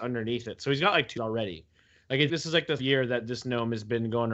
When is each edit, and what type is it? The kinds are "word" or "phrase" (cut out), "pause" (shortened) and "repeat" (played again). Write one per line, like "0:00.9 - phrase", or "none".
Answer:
0:01.2 - word
0:02.3 - word
0:02.8 - word